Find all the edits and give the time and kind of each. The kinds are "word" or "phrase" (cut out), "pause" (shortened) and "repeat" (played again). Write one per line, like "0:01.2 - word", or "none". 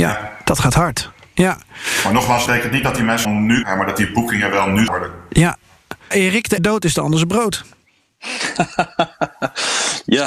0:02.5 - word
0:03.2 - word
0:03.6 - word
0:04.9 - word
0:06.1 - word
0:06.6 - word